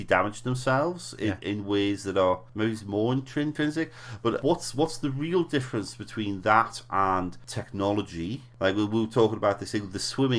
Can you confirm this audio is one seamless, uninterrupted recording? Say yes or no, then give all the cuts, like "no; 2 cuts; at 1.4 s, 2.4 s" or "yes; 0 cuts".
yes; 0 cuts